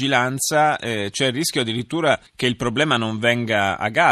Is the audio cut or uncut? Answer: cut